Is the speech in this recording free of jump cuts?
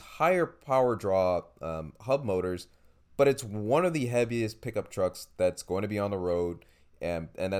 yes; 0 cuts

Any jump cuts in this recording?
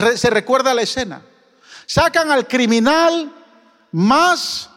no; 0 cuts

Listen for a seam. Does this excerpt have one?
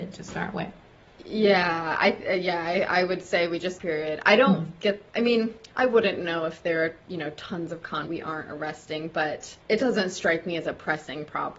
yes; 5 cuts; at 3.8 s, 5.1 s, 5.7 s, 8.1 s, 9.6 s

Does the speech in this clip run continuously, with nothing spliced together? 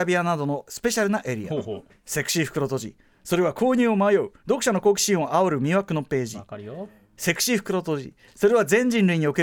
yes; 0 cuts

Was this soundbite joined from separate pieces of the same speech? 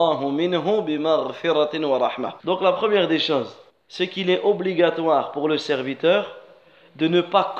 yes; 2 cuts; at 2.4 s, 3.7 s

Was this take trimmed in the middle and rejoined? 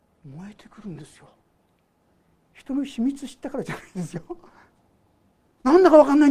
yes; 1 cut; at 2.0 s

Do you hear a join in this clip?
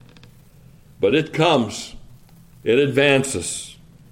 no; 0 cuts

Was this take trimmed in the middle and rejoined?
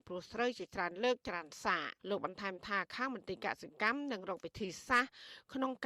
yes; 1 cut; at 2.0 s

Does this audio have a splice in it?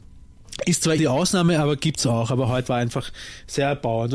yes; 2 cuts; at 1.0 s, 2.7 s

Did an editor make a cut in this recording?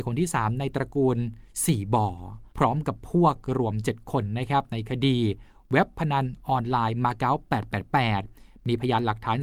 yes; 1 cut; at 2.5 s

